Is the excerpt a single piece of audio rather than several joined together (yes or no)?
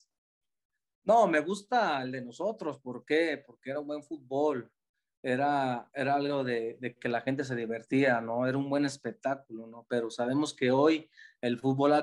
yes